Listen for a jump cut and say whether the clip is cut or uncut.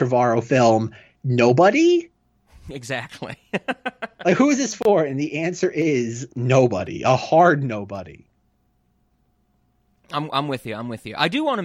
uncut